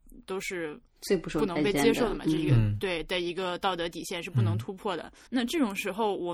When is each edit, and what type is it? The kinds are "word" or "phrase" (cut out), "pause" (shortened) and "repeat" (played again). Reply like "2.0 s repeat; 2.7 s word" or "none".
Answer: 5.3 s pause